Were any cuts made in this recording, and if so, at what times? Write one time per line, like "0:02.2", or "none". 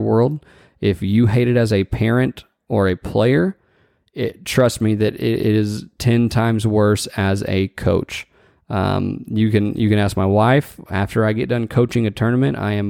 none